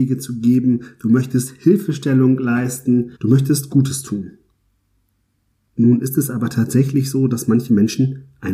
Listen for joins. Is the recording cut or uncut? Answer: cut